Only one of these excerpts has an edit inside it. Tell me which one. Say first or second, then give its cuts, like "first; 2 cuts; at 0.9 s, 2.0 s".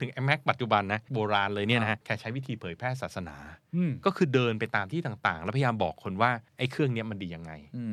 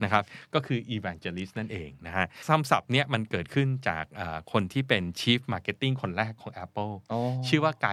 first; 3 cuts; at 1.1 s, 2.0 s, 6.5 s